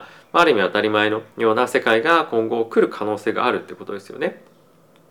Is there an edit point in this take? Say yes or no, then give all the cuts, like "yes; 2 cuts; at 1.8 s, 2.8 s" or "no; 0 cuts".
yes; 1 cut; at 1.3 s